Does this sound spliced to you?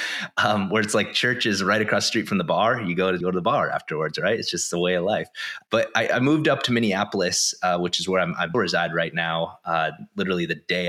yes; 2 cuts; at 3.2 s, 8.5 s

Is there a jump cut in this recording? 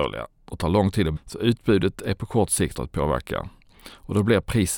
yes; 2 cuts; at 1.2 s, 2.7 s

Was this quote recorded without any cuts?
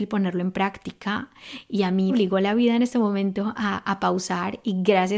no; 1 cut; at 2.1 s

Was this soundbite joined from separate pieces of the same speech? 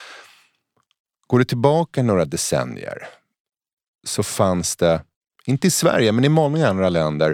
no; 0 cuts

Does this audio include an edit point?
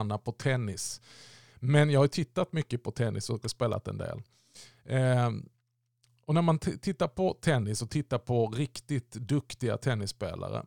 yes; 1 cut; at 3.4 s

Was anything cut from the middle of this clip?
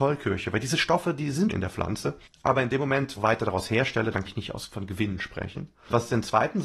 yes; 3 cuts; at 1.5 s, 3.1 s, 4.2 s

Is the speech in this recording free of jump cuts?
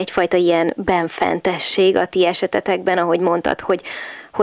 yes; 0 cuts

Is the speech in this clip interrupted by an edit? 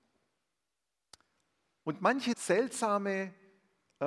yes; 1 cut; at 2.3 s

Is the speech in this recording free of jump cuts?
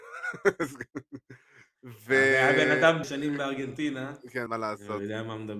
no; 2 cuts; at 3.0 s, 4.5 s

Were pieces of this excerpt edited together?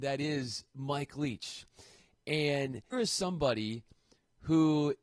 yes; 1 cut; at 2.9 s

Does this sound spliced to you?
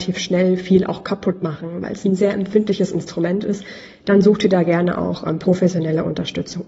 no; 0 cuts

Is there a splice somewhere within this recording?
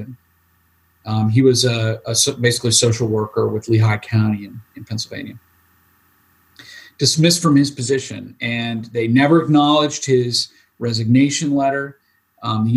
no; 0 cuts

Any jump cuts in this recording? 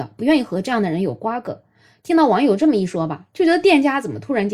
no; 0 cuts

